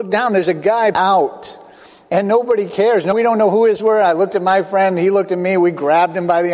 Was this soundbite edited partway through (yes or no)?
yes